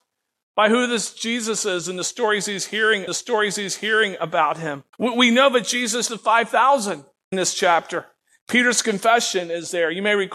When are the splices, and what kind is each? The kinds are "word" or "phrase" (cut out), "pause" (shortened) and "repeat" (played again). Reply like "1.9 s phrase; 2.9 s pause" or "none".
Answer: 3.1 s repeat; 4.9 s pause; 6.1 s word; 7.3 s word; 8.2 s pause